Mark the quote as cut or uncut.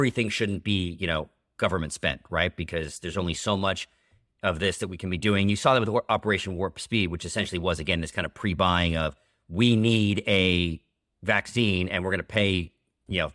uncut